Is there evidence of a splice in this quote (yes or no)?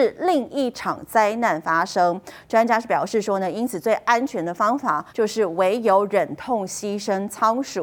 yes